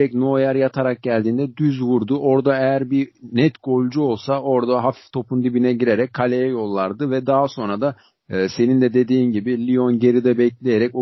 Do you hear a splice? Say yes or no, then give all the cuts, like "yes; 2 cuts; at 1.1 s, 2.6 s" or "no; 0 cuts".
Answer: no; 0 cuts